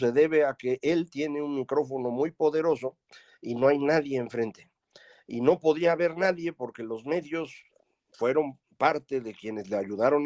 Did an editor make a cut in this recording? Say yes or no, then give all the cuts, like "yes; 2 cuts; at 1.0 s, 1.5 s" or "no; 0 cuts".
no; 0 cuts